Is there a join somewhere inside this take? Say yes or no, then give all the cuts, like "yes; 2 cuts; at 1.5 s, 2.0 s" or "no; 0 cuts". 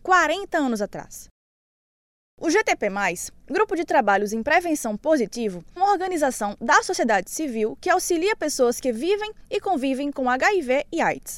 yes; 1 cut; at 5.8 s